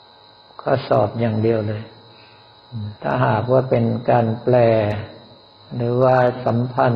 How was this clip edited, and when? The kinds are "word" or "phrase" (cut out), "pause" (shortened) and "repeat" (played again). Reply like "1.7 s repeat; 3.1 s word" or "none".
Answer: 3.0 s pause